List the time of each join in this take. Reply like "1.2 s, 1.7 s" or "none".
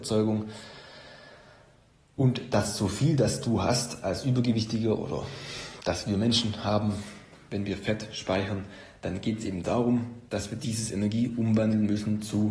none

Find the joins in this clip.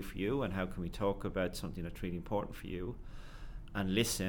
none

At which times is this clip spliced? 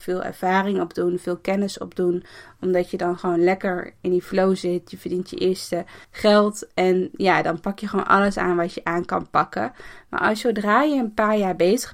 6.0 s

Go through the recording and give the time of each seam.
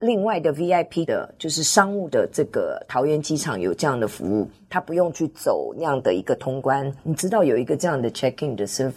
1.1 s, 2.1 s, 7.0 s

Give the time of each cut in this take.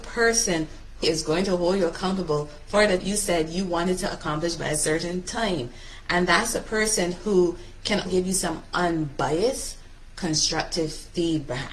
1.0 s, 3.0 s, 8.1 s

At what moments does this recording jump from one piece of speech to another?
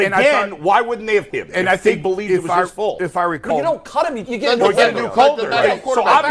1.3 s, 3.5 s, 4.3 s

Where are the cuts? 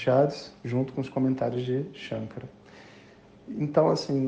none

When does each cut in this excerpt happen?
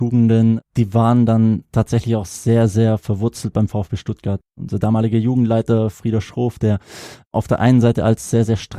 none

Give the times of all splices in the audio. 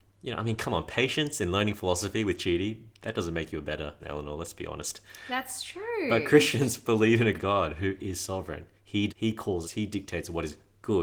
4.0 s, 7.3 s, 9.1 s, 9.6 s

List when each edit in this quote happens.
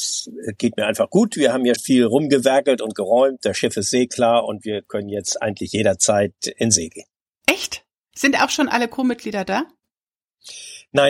1.8 s, 7.2 s

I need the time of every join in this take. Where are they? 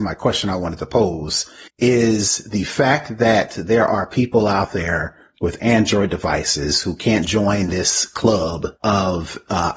1.7 s, 8.8 s

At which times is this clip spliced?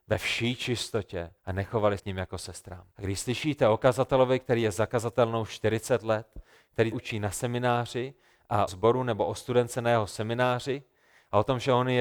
1.4 s, 2.0 s, 2.9 s, 6.9 s, 8.7 s

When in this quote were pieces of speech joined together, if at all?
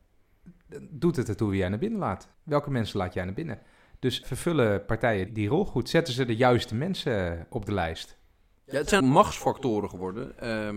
2.3 s, 4.2 s, 5.3 s, 8.5 s, 9.0 s

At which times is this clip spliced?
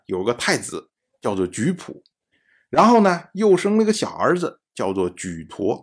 none

